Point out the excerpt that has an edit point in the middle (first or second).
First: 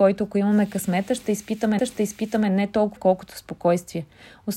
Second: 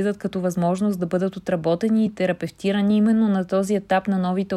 first